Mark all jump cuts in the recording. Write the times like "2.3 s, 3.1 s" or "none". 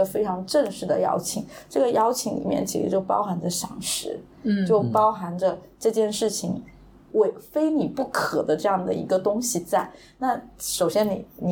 none